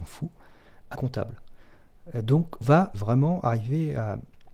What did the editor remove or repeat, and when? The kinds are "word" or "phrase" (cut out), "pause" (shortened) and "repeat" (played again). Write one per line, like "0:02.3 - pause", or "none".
0:00.9 - word
0:02.6 - word
0:02.9 - word